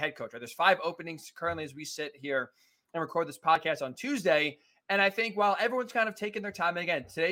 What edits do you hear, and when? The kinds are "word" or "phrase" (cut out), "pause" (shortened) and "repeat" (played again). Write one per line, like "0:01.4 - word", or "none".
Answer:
none